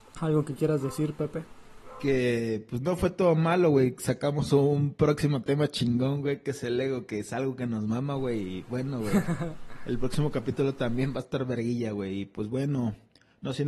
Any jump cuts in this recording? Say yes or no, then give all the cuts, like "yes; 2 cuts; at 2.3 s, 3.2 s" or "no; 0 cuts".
no; 0 cuts